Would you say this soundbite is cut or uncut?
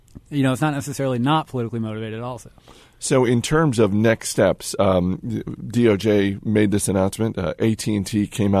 uncut